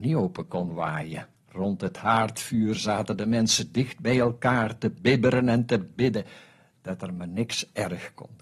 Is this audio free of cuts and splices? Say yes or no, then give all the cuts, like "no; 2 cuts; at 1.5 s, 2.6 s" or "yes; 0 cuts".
no; 1 cut; at 1.3 s